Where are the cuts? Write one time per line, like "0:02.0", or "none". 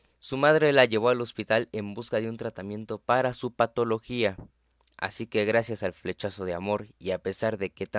none

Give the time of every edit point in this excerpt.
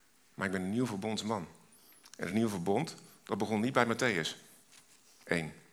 none

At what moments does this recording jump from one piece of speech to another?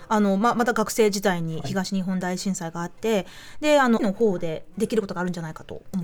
0:04.0

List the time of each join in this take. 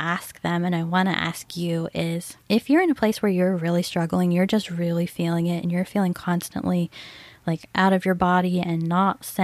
0:02.4

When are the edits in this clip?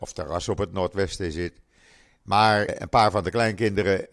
0:02.7

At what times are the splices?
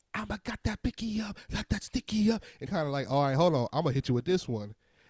0:02.7

